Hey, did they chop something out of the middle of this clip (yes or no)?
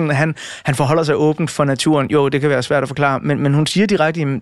no